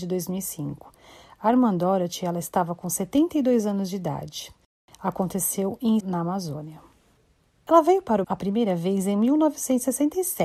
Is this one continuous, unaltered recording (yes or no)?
no